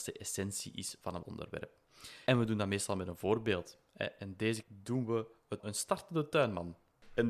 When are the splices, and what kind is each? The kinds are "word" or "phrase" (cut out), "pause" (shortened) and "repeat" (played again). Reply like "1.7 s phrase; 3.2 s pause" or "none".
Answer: 1.2 s word; 4.6 s word; 5.6 s phrase